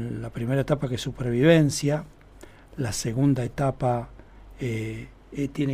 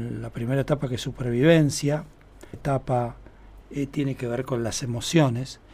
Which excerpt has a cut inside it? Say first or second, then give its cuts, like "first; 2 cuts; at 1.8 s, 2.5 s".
second; 2 cuts; at 2.5 s, 3.6 s